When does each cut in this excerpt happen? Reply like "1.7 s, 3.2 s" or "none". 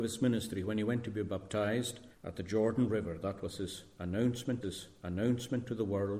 2.1 s, 4.6 s